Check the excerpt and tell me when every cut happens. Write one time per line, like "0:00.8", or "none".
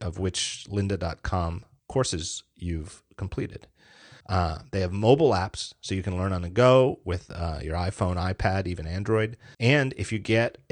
0:01.8
0:04.2
0:09.5